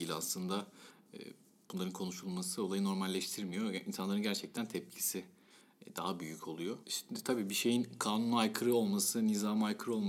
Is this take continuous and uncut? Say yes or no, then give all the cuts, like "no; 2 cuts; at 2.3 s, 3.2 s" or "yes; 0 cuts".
yes; 0 cuts